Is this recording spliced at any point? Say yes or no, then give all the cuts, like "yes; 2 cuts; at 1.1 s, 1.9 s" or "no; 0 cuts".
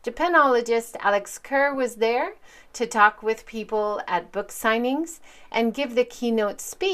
no; 0 cuts